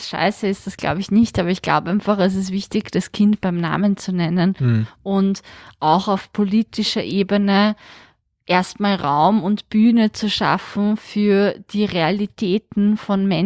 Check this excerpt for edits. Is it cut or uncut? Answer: uncut